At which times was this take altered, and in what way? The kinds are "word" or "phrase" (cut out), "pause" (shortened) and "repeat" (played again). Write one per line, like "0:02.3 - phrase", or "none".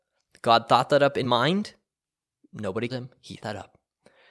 0:01.2 - word
0:02.9 - word
0:03.4 - word